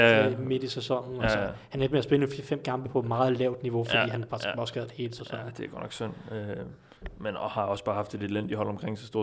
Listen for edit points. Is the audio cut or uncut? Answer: uncut